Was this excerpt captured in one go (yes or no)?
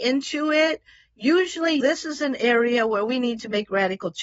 yes